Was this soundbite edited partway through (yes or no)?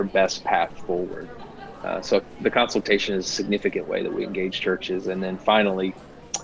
no